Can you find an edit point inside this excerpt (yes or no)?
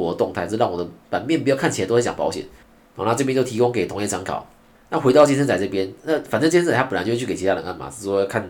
no